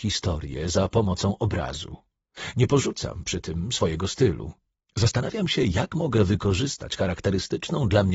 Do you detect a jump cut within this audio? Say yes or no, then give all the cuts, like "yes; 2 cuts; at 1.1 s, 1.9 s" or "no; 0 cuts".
no; 0 cuts